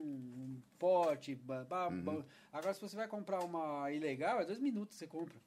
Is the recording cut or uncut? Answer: uncut